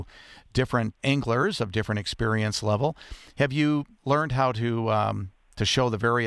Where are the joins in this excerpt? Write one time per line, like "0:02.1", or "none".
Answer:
0:01.0